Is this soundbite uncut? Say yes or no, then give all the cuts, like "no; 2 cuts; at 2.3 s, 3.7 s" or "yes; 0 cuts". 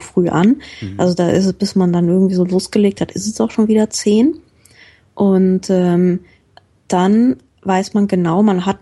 yes; 0 cuts